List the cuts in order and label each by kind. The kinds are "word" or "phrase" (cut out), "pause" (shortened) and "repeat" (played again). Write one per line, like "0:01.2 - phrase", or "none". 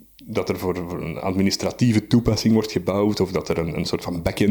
none